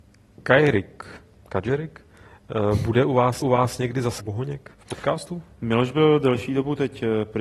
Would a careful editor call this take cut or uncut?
cut